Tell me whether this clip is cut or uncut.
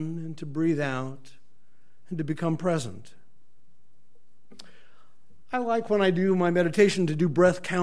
uncut